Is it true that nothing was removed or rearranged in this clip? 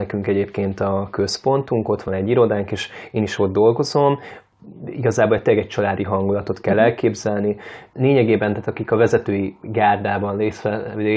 yes; 0 cuts

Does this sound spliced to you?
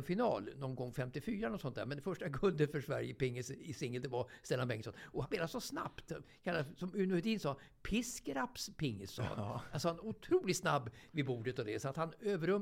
yes; 1 cut; at 5.2 s

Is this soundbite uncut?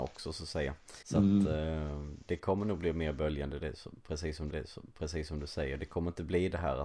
no; 2 cuts; at 1.0 s, 4.5 s

